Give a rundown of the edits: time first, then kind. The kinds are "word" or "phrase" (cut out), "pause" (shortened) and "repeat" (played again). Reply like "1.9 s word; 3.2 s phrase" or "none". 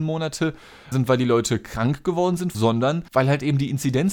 0.9 s word; 2.5 s phrase; 3.1 s pause